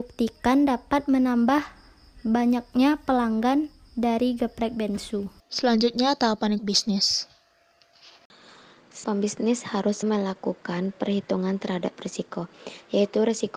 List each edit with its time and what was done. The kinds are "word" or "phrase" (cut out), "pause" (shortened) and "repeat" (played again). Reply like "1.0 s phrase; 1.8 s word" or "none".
5.4 s pause; 6.6 s phrase; 9.0 s word; 10.0 s word